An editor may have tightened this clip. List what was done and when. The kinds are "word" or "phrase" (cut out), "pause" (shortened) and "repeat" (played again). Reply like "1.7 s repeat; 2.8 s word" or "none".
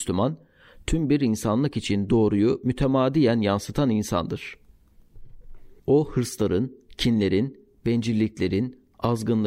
5.8 s pause

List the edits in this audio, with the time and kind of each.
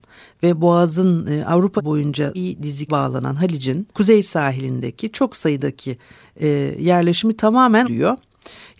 1.8 s word; 2.3 s word; 2.9 s word; 3.9 s pause; 7.8 s word

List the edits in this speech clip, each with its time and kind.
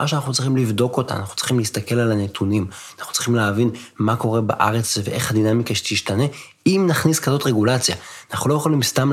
none

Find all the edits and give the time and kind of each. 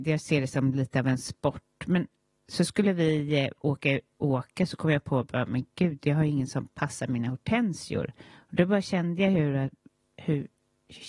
8.3 s pause

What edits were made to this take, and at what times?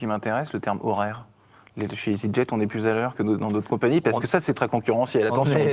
none

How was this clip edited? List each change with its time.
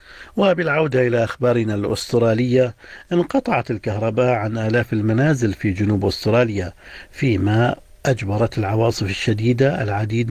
none

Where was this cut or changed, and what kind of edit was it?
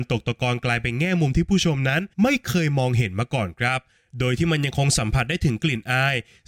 2.1 s pause

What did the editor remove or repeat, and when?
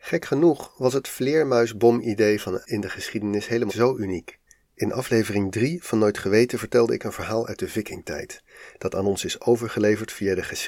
2.6 s word; 3.7 s word; 4.5 s pause

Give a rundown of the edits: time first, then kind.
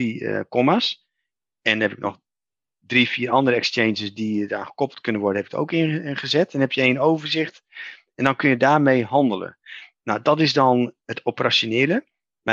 none

